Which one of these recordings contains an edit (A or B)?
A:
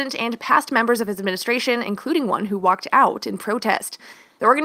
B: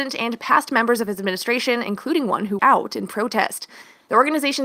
B